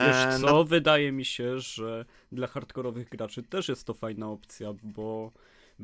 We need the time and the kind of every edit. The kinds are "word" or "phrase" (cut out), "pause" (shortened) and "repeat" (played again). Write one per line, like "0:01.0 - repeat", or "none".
none